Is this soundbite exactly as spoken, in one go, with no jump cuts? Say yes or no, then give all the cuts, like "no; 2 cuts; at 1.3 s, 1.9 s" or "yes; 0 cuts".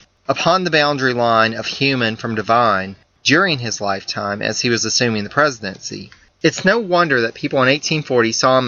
yes; 0 cuts